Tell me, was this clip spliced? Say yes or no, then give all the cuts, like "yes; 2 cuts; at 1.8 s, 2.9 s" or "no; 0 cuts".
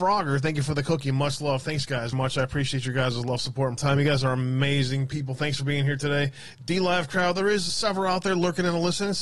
yes; 3 cuts; at 2.1 s, 3.8 s, 7.7 s